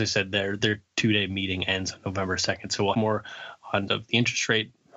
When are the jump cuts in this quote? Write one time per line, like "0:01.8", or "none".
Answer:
0:02.9
0:03.9